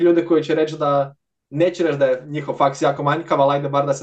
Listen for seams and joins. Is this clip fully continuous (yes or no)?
yes